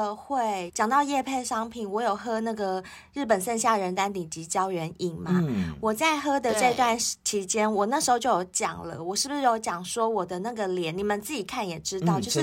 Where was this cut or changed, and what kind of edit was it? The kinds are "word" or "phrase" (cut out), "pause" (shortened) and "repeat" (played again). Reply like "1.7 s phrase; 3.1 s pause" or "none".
none